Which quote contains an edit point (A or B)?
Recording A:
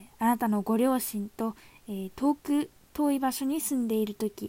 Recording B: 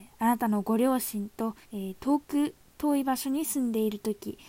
B